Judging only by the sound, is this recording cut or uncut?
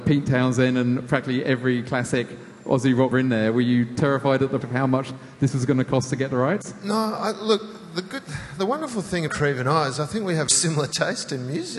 cut